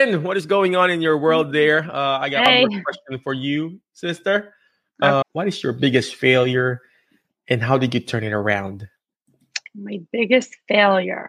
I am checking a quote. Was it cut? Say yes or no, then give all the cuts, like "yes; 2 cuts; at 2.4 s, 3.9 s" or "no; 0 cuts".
yes; 1 cut; at 5.2 s